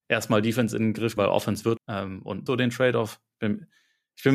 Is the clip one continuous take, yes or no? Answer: no